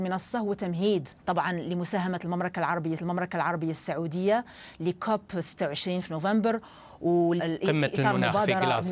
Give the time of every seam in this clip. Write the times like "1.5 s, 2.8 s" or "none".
1.2 s, 3.0 s, 7.4 s